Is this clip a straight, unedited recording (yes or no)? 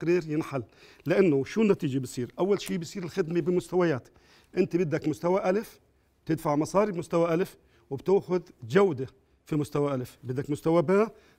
yes